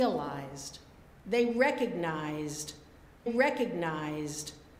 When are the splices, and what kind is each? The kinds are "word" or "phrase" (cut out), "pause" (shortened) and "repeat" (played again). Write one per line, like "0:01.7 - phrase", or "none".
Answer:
0:03.3 - repeat